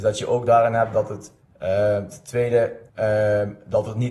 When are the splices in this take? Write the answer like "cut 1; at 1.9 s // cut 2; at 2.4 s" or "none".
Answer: cut 1; at 1.4 s // cut 2; at 2.9 s